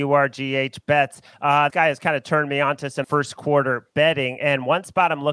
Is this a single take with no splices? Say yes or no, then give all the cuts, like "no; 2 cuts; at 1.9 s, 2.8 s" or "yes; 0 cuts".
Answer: no; 2 cuts; at 1.7 s, 3.0 s